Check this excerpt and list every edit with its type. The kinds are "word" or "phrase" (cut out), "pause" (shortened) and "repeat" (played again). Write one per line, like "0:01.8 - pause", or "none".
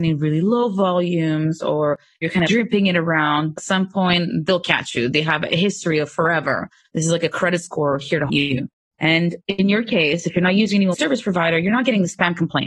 0:02.5 - word
0:03.6 - word
0:08.3 - word
0:10.9 - word